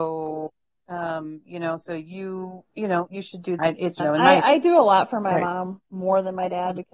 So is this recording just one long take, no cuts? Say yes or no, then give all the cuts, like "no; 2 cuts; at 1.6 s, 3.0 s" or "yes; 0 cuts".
no; 4 cuts; at 2.7 s, 3.1 s, 3.6 s, 4.0 s